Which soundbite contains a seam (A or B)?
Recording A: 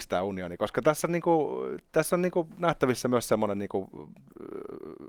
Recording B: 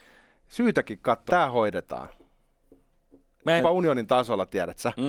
B